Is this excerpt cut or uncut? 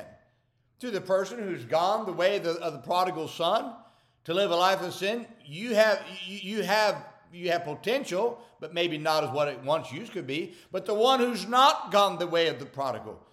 uncut